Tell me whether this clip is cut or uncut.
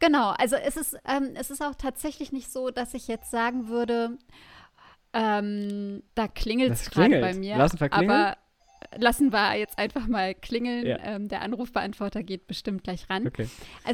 cut